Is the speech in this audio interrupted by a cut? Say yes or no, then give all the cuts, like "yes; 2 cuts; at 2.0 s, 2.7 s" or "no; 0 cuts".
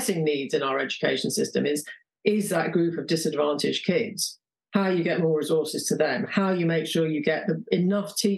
no; 0 cuts